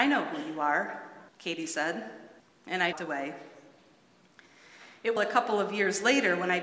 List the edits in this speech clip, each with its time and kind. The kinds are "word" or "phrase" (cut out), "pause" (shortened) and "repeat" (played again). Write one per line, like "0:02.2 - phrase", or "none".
0:01.3 - pause
0:02.4 - pause
0:02.9 - phrase
0:05.2 - phrase